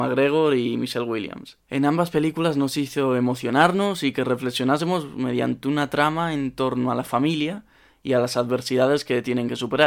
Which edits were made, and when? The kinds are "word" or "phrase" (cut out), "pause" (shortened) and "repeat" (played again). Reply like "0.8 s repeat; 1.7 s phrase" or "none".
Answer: 1.6 s pause